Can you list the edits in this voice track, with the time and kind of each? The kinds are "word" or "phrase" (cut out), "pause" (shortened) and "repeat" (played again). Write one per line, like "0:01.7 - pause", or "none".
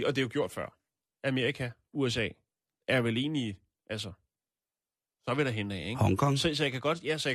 none